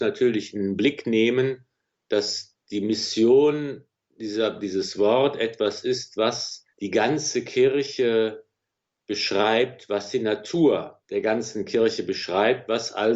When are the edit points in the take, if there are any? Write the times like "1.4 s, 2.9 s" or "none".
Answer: 2.6 s, 6.7 s, 11.0 s